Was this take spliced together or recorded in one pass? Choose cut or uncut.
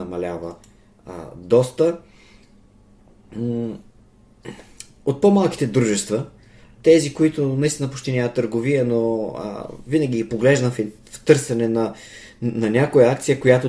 uncut